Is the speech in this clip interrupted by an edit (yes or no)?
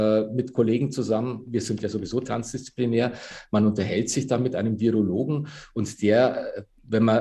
no